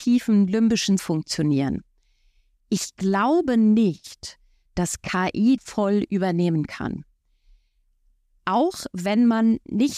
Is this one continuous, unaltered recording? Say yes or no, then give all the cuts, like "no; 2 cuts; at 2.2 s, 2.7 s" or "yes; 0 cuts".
no; 2 cuts; at 1.0 s, 5.6 s